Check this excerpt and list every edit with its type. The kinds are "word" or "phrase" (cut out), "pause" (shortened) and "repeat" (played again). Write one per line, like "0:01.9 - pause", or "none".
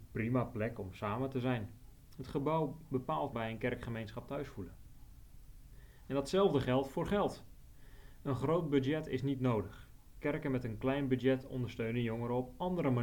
0:03.3 - phrase